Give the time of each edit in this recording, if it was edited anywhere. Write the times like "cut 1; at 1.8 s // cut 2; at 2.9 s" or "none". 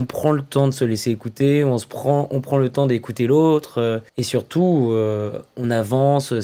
cut 1; at 4.1 s